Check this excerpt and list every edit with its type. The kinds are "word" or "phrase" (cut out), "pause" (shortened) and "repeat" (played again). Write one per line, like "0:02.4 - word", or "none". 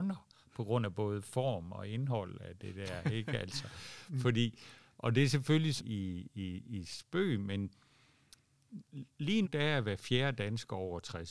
0:05.8 - phrase
0:09.4 - word